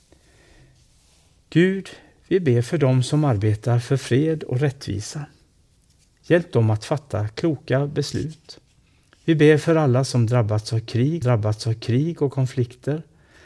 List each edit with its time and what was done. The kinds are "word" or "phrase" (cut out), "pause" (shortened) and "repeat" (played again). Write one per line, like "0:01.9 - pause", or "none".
0:11.2 - repeat